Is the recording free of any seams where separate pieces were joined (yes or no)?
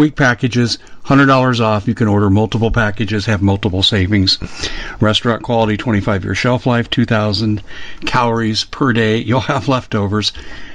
yes